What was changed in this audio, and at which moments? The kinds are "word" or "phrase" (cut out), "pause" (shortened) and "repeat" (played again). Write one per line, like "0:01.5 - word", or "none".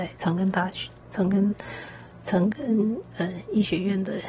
none